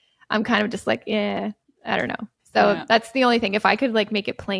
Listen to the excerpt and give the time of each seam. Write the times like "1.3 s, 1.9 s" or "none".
none